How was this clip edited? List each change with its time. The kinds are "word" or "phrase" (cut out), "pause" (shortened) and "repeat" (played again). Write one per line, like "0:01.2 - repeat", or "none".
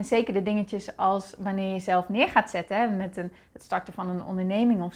none